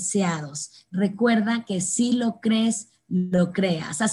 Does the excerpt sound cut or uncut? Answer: uncut